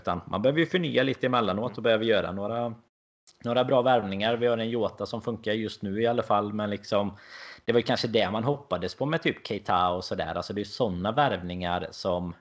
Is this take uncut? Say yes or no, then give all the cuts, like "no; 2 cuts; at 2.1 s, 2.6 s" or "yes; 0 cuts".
yes; 0 cuts